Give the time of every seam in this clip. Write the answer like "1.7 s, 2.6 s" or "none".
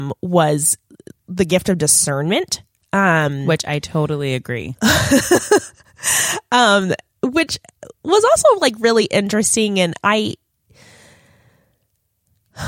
none